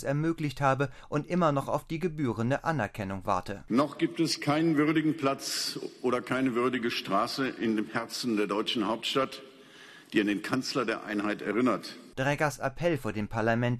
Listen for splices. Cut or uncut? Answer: uncut